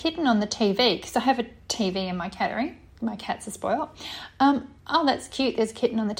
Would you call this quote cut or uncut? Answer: cut